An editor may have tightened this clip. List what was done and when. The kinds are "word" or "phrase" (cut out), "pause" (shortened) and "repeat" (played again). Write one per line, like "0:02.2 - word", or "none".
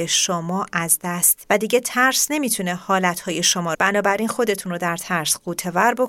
0:01.4 - word
0:03.7 - phrase